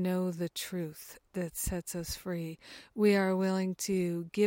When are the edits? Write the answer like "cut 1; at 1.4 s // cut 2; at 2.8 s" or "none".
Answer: none